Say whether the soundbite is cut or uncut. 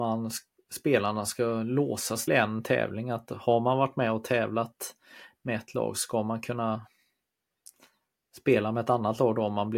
cut